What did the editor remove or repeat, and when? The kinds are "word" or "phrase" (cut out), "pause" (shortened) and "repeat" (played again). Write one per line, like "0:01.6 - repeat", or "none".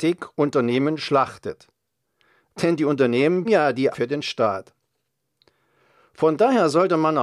0:03.4 - word
0:03.9 - word